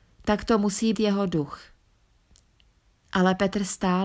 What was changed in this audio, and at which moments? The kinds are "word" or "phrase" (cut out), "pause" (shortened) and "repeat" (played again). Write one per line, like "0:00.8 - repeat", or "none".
0:00.9 - word